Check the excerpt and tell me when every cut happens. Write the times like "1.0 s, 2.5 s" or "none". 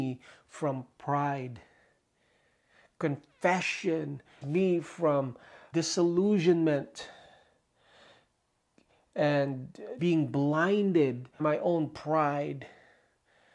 4.4 s, 5.7 s, 10.0 s, 11.4 s